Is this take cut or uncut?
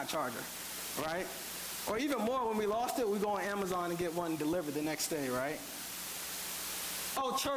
uncut